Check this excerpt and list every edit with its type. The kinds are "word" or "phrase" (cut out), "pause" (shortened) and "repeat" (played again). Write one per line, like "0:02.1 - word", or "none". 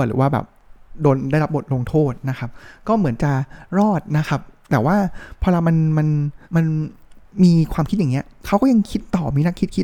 0:06.4 - pause